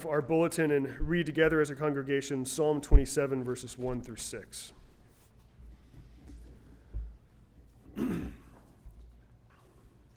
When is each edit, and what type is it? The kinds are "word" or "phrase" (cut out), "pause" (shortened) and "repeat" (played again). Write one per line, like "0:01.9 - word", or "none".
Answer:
none

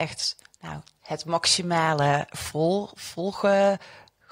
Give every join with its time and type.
0:01.0 - word

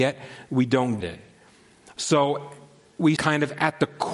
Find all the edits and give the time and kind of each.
0:01.0 - word
0:03.2 - word

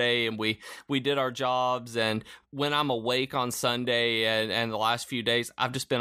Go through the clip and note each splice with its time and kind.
0:02.4 - pause

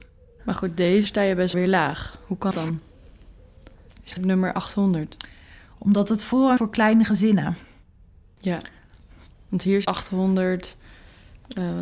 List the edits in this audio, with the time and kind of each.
0:01.1 - word
0:01.5 - word
0:02.5 - word
0:04.2 - word
0:06.6 - word
0:09.8 - word

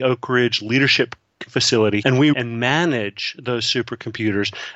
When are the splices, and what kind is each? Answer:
0:01.5 - word
0:02.0 - word
0:02.3 - word

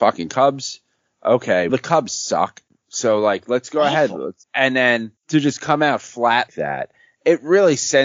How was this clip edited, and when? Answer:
0:01.7 - word
0:02.7 - pause
0:04.4 - pause
0:05.2 - pause
0:06.5 - word

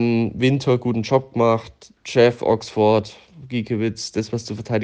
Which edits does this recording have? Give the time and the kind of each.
0:02.0 - pause

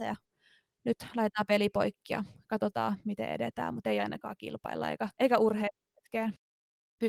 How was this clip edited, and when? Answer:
0:05.1 - pause

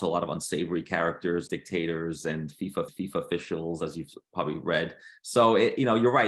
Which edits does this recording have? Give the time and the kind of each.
0:01.5 - word
0:02.9 - repeat

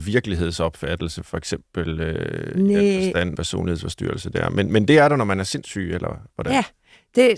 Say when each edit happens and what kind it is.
0:03.4 - phrase

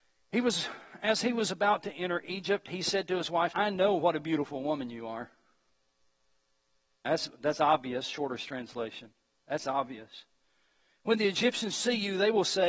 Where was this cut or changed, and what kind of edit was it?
0:03.5 - word

